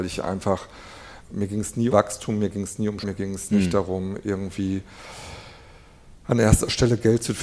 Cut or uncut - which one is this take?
cut